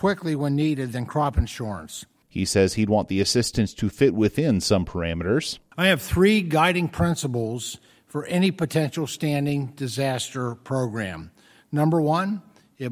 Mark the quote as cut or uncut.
uncut